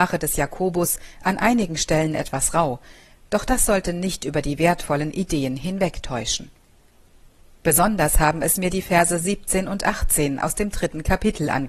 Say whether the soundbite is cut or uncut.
uncut